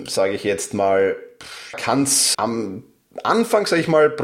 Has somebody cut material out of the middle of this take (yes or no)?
yes